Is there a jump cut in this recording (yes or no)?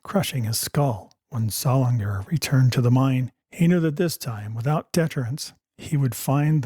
yes